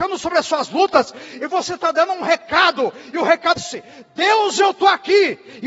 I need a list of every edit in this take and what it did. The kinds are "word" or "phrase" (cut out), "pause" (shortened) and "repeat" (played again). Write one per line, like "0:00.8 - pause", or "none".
0:03.6 - word